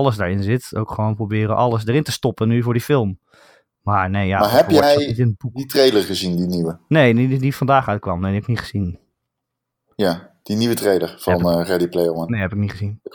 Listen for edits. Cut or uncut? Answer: uncut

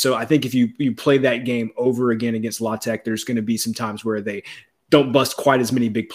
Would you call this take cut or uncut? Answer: uncut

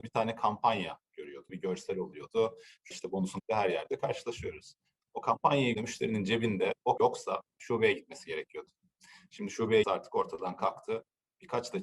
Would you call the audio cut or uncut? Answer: cut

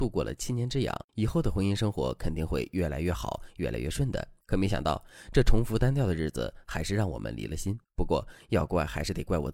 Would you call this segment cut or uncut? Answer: cut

